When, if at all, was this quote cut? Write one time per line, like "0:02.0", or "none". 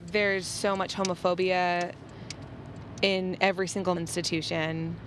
0:04.0